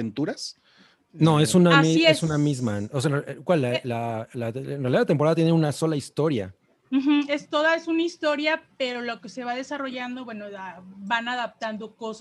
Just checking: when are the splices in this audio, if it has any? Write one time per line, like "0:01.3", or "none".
0:06.6